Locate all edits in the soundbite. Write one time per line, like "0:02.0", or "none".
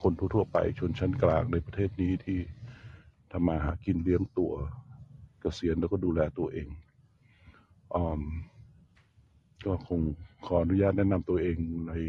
none